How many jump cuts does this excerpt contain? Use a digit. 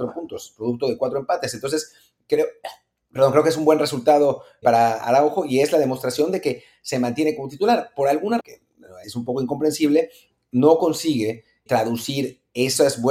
4